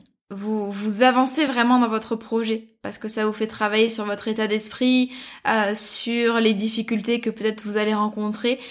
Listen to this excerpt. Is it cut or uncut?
uncut